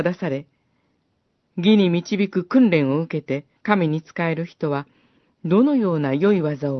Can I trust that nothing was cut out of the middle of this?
no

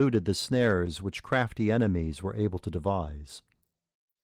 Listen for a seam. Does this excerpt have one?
no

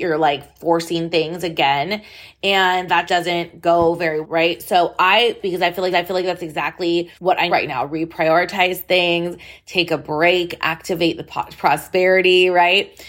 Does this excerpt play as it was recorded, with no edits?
no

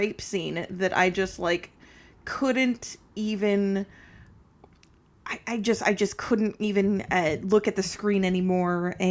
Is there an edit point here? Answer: no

